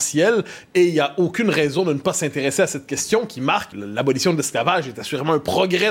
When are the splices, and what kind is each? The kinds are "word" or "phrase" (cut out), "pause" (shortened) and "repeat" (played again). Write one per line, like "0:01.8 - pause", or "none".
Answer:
0:03.7 - word